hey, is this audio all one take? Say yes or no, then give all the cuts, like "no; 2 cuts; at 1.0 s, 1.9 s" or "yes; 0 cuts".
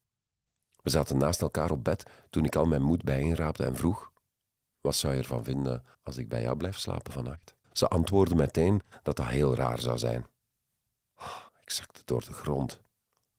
no; 3 cuts; at 5.9 s, 7.6 s, 11.5 s